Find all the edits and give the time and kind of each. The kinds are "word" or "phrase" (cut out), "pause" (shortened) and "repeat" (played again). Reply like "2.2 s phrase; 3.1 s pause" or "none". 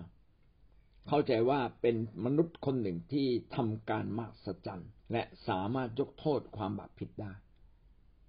5.0 s pause